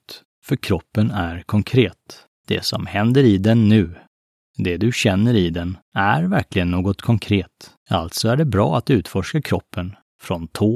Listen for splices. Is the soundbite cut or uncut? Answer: cut